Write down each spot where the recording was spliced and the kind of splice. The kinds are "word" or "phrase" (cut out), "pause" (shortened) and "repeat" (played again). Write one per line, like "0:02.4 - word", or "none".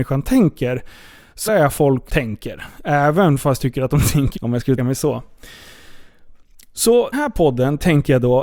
0:01.5 - word
0:02.1 - word
0:03.6 - word
0:04.3 - word
0:04.8 - word
0:07.1 - word